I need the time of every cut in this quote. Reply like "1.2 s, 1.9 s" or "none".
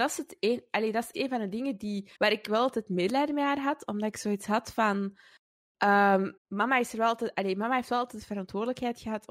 1.1 s, 2.2 s, 6.4 s